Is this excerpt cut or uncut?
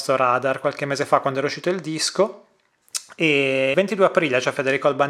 cut